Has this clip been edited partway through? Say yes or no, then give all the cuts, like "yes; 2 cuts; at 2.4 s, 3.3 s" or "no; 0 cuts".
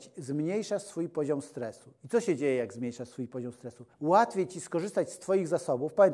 yes; 1 cut; at 3.9 s